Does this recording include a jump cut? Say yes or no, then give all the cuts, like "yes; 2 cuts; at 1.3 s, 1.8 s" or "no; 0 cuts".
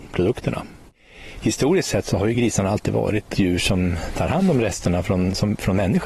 no; 0 cuts